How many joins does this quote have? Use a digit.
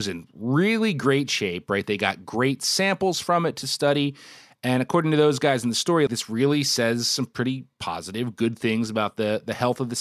1